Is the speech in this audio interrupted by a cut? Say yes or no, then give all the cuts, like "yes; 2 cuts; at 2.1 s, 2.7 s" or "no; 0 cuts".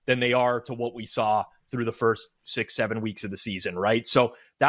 no; 0 cuts